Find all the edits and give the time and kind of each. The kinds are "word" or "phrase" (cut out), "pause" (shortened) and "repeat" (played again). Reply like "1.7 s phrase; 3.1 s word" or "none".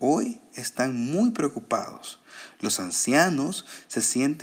none